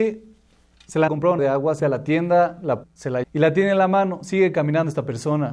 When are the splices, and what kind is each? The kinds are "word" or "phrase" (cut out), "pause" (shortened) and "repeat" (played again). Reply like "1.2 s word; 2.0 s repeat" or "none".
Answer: 1.1 s word; 1.4 s word; 1.8 s word; 2.8 s word; 3.2 s word